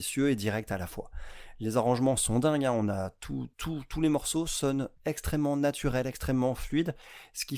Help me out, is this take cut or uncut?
cut